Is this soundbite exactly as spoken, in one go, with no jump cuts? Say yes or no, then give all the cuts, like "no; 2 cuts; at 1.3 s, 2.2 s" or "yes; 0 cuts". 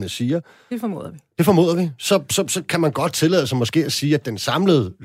yes; 0 cuts